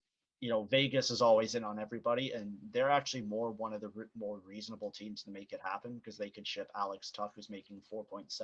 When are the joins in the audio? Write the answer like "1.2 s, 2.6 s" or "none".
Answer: none